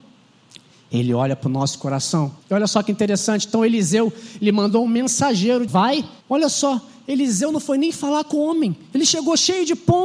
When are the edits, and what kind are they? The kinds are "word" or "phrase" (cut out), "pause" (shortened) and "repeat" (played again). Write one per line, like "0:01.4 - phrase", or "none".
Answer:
0:02.4 - pause
0:05.7 - word
0:06.2 - pause